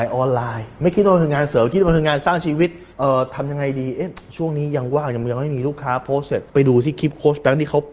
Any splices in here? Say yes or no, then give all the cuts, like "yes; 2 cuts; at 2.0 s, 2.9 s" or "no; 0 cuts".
yes; 2 cuts; at 2.9 s, 6.5 s